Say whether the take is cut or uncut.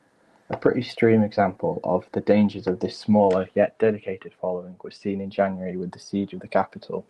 uncut